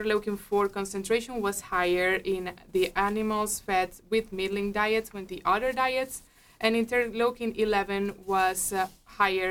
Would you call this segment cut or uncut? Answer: cut